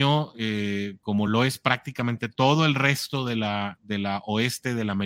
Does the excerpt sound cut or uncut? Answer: uncut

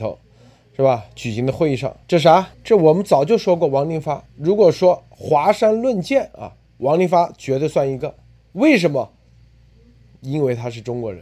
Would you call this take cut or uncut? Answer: cut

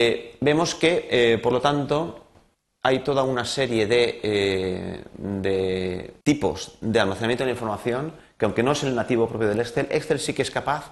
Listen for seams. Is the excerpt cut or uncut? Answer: cut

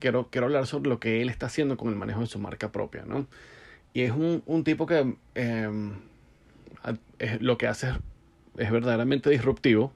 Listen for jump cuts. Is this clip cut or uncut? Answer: uncut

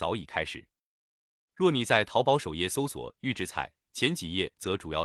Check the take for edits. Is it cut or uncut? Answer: uncut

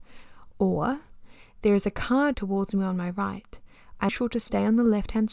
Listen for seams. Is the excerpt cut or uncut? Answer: cut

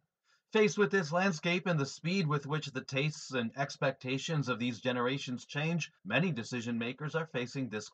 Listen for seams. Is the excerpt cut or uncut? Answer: cut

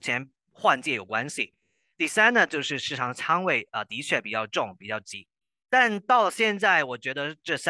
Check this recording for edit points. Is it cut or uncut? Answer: uncut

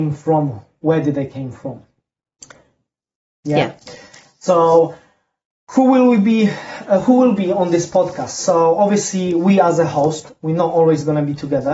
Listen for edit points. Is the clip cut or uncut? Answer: uncut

